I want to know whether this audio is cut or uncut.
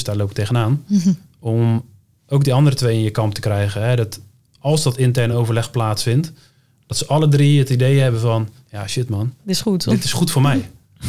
uncut